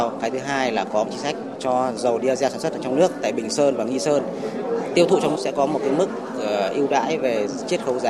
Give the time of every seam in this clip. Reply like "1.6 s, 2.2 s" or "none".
5.3 s